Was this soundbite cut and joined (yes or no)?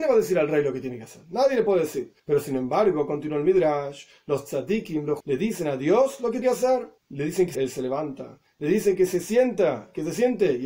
yes